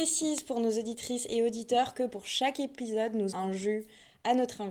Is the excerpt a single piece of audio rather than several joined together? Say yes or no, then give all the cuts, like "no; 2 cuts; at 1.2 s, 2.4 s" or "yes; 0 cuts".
no; 1 cut; at 3.3 s